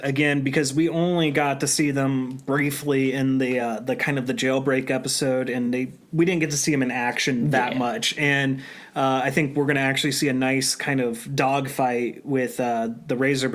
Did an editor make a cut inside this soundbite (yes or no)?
no